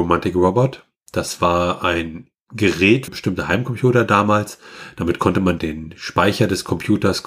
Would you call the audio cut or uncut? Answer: cut